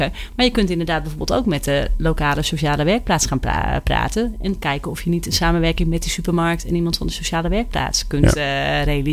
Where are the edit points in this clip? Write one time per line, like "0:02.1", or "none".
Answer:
none